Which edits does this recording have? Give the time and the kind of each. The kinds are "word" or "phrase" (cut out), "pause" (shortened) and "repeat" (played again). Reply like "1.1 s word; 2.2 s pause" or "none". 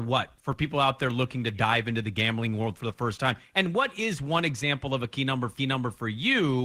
5.6 s repeat